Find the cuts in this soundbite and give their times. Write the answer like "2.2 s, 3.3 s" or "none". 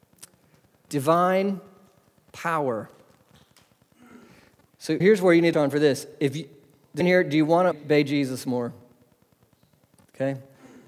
5.0 s, 5.5 s, 7.0 s, 7.7 s